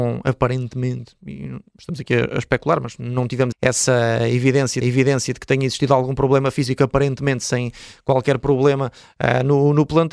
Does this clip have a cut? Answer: yes; 2 cuts; at 3.5 s, 4.8 s

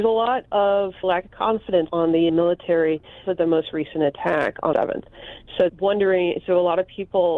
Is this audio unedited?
no; 6 cuts; at 1.0 s, 1.9 s, 2.3 s, 3.2 s, 4.7 s, 5.7 s

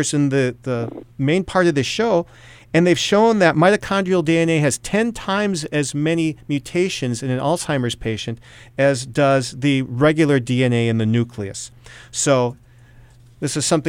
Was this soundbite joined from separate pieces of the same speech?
yes; 2 cuts; at 1.1 s, 6.4 s

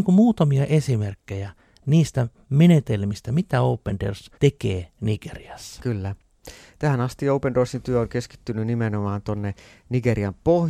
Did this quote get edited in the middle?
yes; 1 cut; at 4.4 s

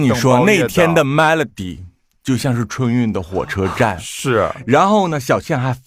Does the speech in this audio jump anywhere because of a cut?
no; 0 cuts

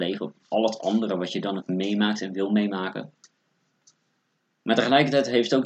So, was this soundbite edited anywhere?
no; 0 cuts

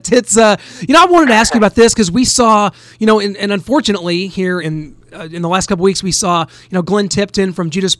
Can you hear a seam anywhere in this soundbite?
yes; 1 cut; at 4.6 s

